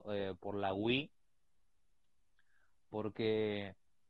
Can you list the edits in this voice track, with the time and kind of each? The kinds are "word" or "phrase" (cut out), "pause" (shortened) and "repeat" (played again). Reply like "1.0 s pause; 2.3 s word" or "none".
none